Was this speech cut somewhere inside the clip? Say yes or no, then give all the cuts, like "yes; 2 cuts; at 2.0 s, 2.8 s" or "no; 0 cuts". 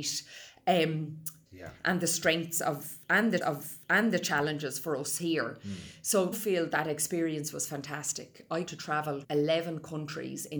yes; 5 cuts; at 1.5 s, 3.4 s, 6.3 s, 8.7 s, 9.2 s